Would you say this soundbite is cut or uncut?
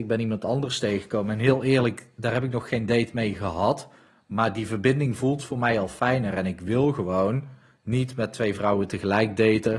uncut